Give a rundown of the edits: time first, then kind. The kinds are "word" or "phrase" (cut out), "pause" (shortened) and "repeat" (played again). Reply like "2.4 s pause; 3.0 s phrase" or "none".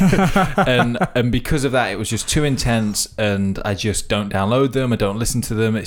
none